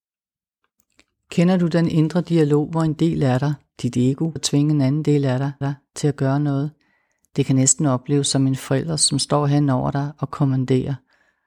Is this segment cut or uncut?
cut